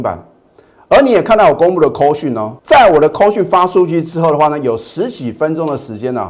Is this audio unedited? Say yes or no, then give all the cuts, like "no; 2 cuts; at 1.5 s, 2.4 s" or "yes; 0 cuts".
no; 1 cut; at 2.6 s